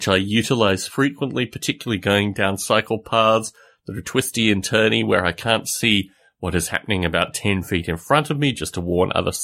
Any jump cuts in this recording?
no; 0 cuts

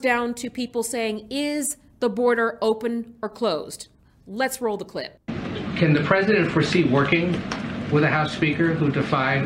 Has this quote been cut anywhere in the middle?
yes; 1 cut; at 3.9 s

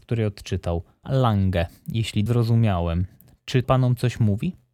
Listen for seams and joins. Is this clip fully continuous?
no; 3 cuts; at 1.0 s, 2.3 s, 3.6 s

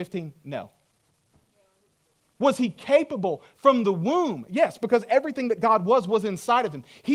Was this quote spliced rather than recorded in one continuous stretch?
no; 0 cuts

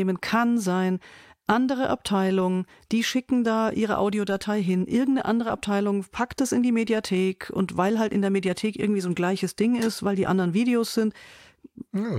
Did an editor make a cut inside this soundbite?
no; 0 cuts

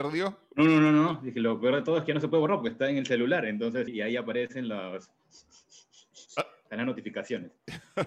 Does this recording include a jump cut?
yes; 2 cuts; at 3.9 s, 6.3 s

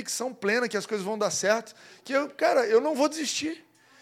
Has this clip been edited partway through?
no; 0 cuts

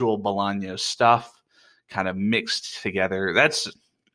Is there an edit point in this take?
no; 0 cuts

